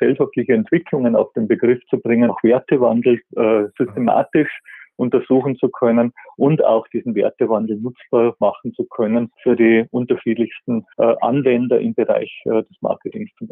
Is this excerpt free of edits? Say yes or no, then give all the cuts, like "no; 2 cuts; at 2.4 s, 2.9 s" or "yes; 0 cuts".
no; 3 cuts; at 2.3 s, 9.3 s, 10.9 s